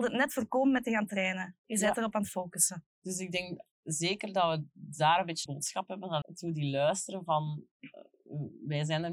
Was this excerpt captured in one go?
no; 4 cuts; at 2.9 s, 3.7 s, 5.5 s, 6.2 s

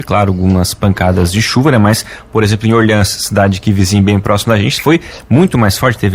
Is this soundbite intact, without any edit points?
yes; 0 cuts

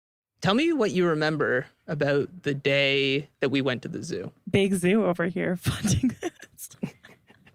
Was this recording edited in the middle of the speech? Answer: yes; 1 cut; at 3.3 s

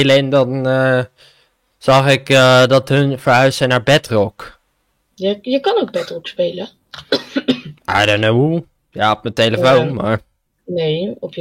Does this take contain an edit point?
no; 0 cuts

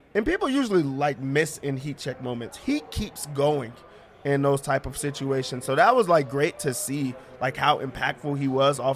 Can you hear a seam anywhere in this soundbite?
no; 0 cuts

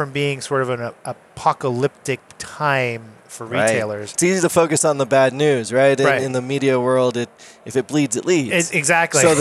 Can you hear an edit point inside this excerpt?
no; 0 cuts

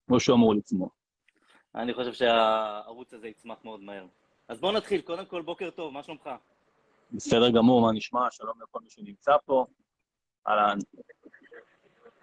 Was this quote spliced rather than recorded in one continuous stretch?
no; 0 cuts

